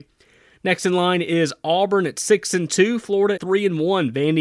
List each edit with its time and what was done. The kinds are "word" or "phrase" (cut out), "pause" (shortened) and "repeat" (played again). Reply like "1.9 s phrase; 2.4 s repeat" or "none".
3.4 s word